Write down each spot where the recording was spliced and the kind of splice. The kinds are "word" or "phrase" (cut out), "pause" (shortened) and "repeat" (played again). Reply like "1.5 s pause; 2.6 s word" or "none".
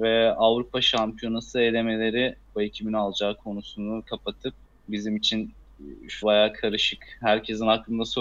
2.6 s phrase; 4.6 s pause; 6.2 s word